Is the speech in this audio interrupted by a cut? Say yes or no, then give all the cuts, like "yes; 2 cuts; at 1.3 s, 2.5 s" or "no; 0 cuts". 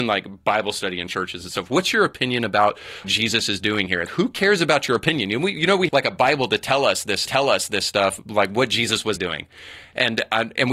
yes; 5 cuts; at 3.0 s, 4.1 s, 5.9 s, 7.3 s, 9.2 s